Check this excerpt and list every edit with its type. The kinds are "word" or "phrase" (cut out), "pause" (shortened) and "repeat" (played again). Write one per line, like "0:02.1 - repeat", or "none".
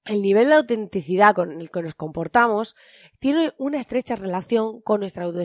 none